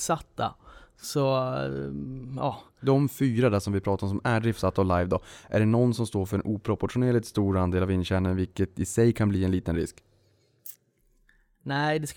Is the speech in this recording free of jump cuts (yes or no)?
yes